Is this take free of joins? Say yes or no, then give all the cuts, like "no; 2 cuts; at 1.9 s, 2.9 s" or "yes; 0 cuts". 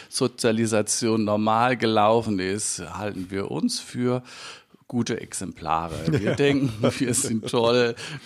yes; 0 cuts